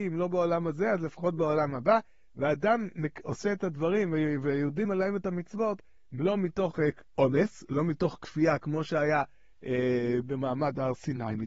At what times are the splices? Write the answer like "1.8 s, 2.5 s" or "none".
4.8 s